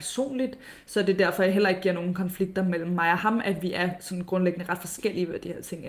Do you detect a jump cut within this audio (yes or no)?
no